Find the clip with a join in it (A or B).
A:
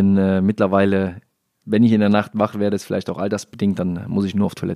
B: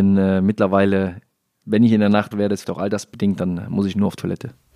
B